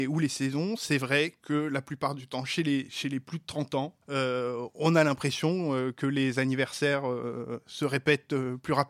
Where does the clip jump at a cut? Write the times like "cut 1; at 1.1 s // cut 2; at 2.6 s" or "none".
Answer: cut 1; at 4.0 s